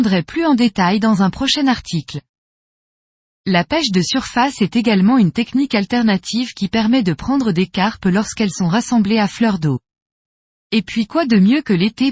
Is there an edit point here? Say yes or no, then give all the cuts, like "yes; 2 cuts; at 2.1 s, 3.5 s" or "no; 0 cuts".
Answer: no; 0 cuts